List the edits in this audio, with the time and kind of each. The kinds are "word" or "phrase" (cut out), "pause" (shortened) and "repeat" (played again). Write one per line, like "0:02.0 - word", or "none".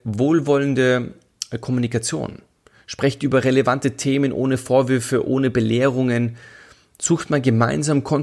none

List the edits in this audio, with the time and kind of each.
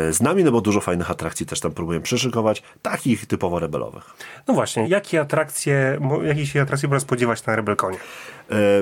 0:04.8 - word

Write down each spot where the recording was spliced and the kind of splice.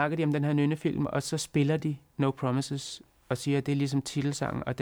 none

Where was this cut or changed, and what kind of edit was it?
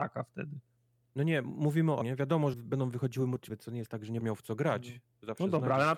0:02.0 - word
0:02.5 - word
0:03.5 - word
0:04.2 - word

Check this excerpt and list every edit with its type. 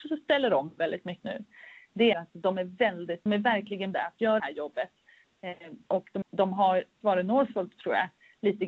0:01.2 - word
0:02.1 - word
0:03.3 - word
0:03.9 - word
0:04.4 - word
0:06.2 - word
0:07.0 - word

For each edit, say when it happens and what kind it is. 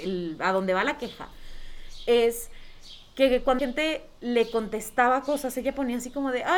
0:03.6 - word

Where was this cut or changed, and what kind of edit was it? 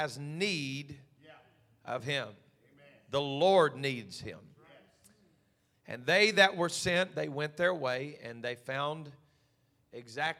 none

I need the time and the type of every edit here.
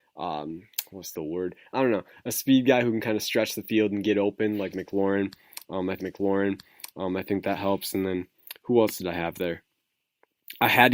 0:01.1 - phrase
0:06.0 - repeat

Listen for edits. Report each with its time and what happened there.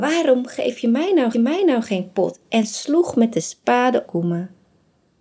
0:01.3 - repeat
0:04.1 - phrase

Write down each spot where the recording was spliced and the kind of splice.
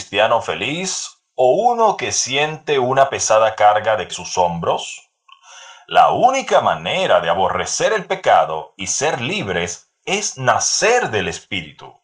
0:04.1 - phrase

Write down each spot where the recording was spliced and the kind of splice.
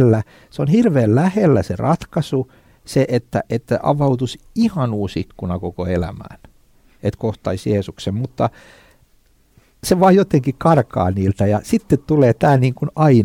none

